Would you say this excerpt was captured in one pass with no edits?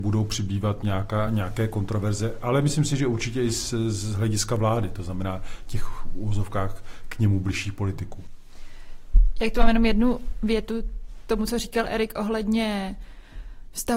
yes; 0 cuts

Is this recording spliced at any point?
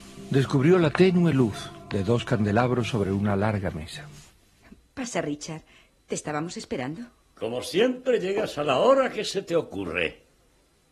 no; 0 cuts

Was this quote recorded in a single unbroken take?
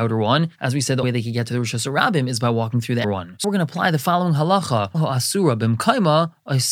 no; 4 cuts; at 1.0 s, 3.0 s, 3.4 s, 4.9 s

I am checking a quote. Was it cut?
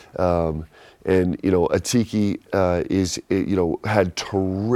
no; 0 cuts

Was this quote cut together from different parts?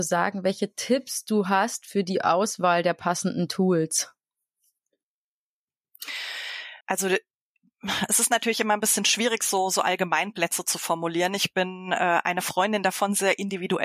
yes; 1 cut; at 6.8 s

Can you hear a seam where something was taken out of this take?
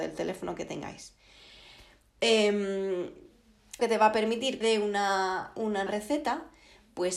yes; 3 cuts; at 3.8 s, 4.6 s, 5.9 s

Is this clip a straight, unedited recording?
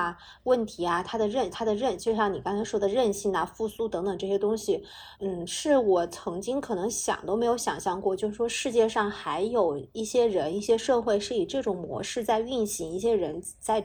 no; 2 cuts; at 1.5 s, 5.1 s

